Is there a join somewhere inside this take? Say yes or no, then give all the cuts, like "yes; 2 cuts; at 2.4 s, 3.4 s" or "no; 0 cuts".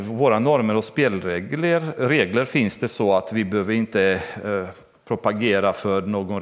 no; 0 cuts